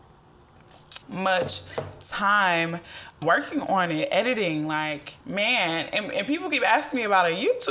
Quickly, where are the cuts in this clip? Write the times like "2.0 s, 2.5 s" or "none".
1.0 s, 3.2 s, 5.2 s